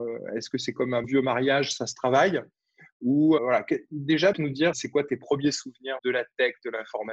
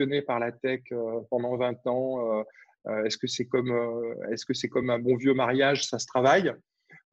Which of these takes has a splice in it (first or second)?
first